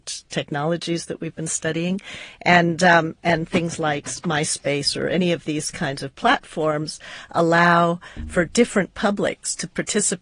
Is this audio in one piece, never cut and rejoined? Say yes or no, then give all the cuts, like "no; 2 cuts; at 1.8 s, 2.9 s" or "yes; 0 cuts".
yes; 0 cuts